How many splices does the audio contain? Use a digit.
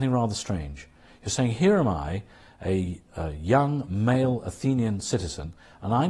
0